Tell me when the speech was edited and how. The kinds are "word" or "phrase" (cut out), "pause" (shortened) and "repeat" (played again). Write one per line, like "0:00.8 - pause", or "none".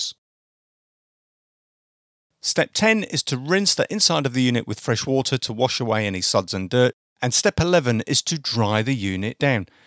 0:07.1 - pause